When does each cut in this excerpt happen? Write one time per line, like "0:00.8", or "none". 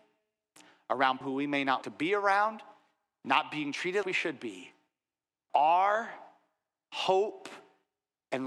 0:01.2
0:01.8
0:04.0
0:05.5

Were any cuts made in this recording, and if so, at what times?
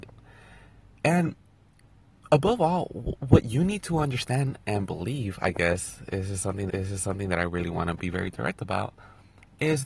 0:06.7

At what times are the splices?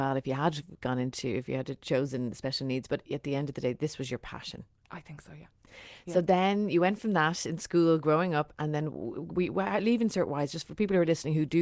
none

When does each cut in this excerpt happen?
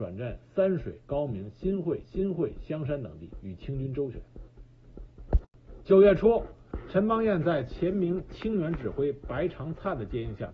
0:02.0

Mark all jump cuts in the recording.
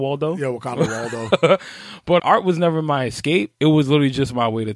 0:02.2
0:03.5

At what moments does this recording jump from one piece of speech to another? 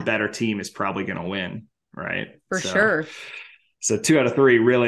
none

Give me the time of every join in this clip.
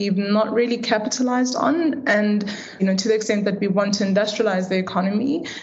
none

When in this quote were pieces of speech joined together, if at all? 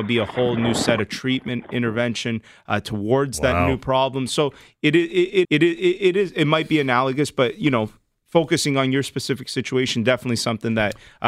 0:05.4

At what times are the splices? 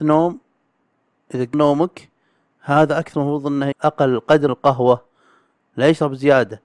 0:01.5
0:03.1
0:03.7
0:04.5

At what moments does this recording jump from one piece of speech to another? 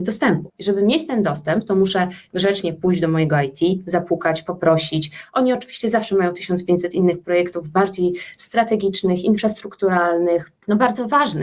none

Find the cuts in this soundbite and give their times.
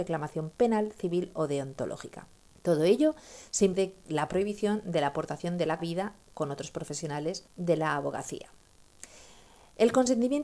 0:02.5
0:03.7
0:05.8
0:07.5

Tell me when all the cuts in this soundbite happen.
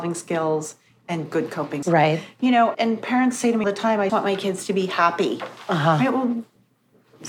0:01.8
0:02.7
0:03.6
0:04.1

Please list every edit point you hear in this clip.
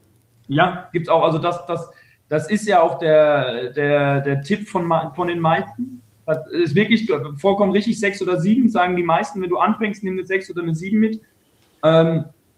none

